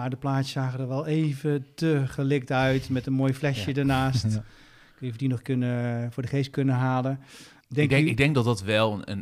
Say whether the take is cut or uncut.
uncut